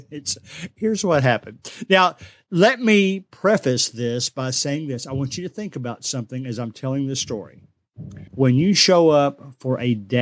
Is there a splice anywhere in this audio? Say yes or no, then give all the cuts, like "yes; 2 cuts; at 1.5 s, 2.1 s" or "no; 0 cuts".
yes; 1 cut; at 8.3 s